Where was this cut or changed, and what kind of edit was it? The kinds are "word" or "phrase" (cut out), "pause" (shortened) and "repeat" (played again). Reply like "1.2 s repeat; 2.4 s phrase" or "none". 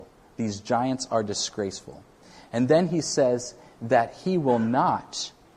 none